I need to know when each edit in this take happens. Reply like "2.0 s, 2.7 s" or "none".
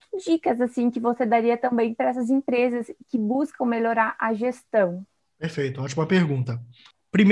none

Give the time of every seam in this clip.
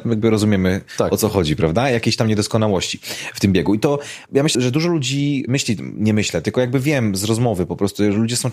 4.5 s

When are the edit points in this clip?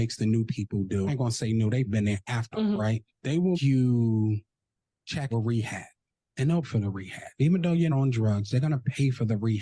1.1 s, 1.9 s, 2.5 s, 3.5 s, 5.3 s, 6.6 s, 7.9 s

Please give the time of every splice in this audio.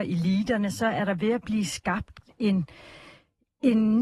none

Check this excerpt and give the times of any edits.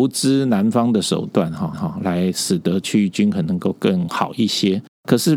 1.7 s

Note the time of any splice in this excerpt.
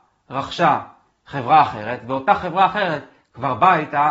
none

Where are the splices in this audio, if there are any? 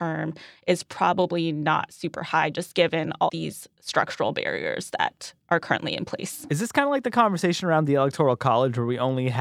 3.3 s

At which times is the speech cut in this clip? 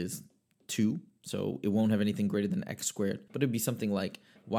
3.3 s

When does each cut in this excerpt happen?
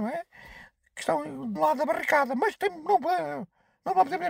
1.6 s

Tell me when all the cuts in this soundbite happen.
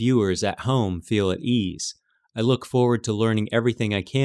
none

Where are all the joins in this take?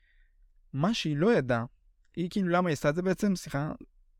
none

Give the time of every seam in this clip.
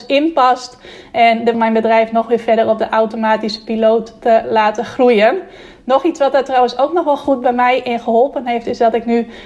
1.5 s

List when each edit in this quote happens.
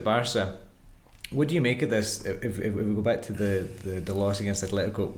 none

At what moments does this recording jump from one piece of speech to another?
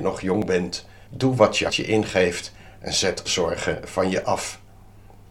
1.1 s, 1.7 s, 3.3 s

